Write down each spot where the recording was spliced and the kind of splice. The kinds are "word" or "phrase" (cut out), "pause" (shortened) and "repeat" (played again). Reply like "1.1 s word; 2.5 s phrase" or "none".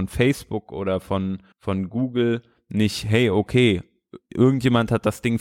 1.5 s pause